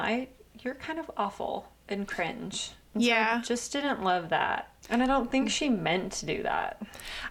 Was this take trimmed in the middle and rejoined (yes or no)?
no